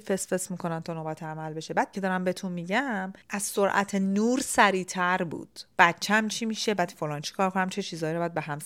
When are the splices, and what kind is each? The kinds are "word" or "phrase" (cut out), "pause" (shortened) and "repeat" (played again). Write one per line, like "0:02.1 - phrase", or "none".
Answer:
0:01.9 - phrase
0:06.7 - word
0:07.2 - word

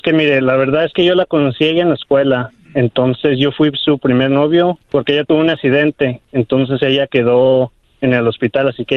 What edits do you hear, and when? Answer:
0:04.8 - pause

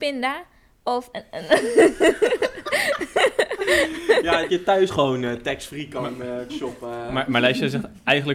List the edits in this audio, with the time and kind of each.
0:01.1 - word
0:04.5 - word
0:04.9 - word
0:06.5 - word

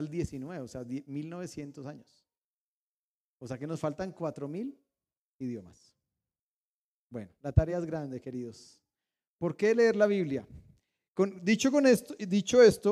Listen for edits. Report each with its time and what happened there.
none

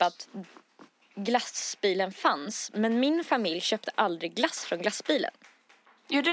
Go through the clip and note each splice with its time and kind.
none

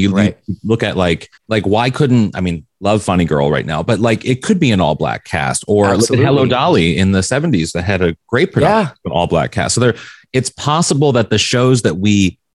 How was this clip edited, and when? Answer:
0:01.4 - pause

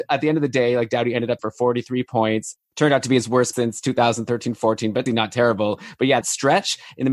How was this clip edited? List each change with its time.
0:01.4 - word
0:03.5 - word
0:05.1 - word
0:06.2 - word

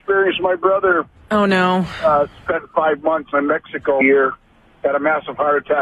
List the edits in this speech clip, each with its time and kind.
0:03.3 - word
0:04.0 - word

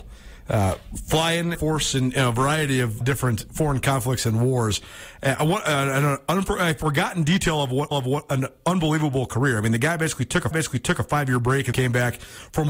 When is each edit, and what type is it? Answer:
0:01.5 - phrase
0:03.0 - word
0:07.9 - repeat
0:10.5 - repeat
0:11.7 - word

